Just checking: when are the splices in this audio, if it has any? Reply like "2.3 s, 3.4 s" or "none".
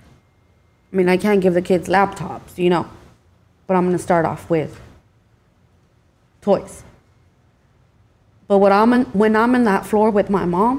none

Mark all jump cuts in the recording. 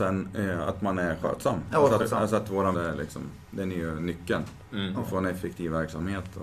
2.0 s, 2.7 s

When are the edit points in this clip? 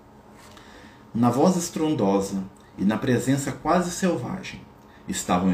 none

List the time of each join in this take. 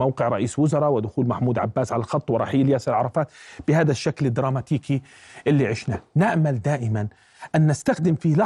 none

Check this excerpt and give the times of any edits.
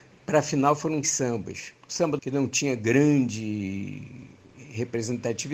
1.0 s, 1.8 s, 2.2 s

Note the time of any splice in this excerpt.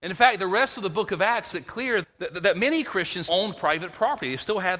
1.5 s, 2.0 s, 3.3 s

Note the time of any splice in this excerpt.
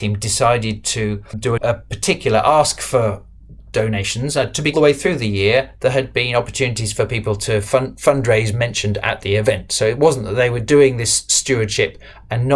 1.6 s, 4.7 s

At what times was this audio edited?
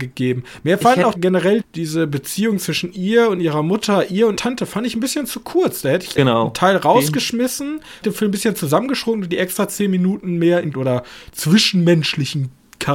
1.1 s, 1.6 s, 4.4 s, 6.2 s, 8.0 s, 10.7 s

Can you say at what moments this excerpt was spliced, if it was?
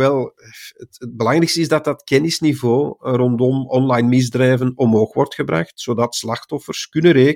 none

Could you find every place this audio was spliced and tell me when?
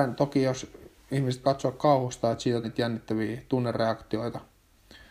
1.4 s, 2.6 s

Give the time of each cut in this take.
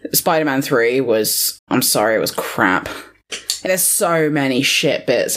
1.6 s, 3.7 s

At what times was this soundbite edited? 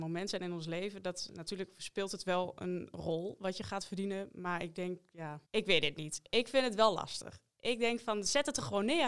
5.4 s

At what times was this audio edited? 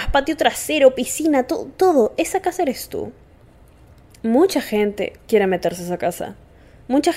5.2 s

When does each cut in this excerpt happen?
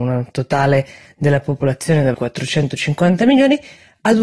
2.1 s

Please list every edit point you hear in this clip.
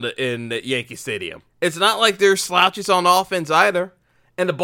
1.5 s

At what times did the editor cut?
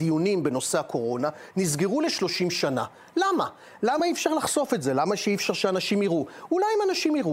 none

